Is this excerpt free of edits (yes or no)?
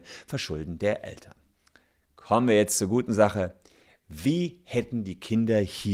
yes